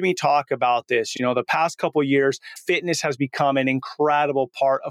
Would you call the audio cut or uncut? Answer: uncut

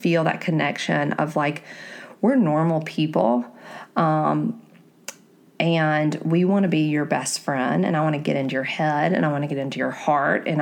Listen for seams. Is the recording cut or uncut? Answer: uncut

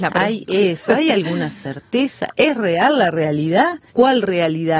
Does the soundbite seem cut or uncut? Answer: cut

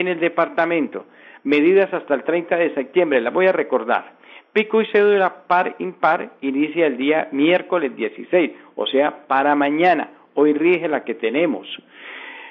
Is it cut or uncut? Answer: uncut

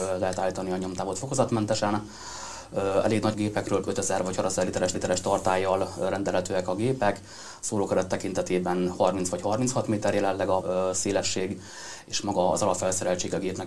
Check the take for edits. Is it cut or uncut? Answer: cut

